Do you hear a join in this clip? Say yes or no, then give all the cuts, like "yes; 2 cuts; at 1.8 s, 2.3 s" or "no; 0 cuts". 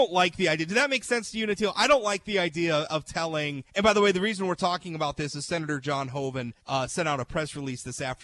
yes; 2 cuts; at 3.7 s, 6.6 s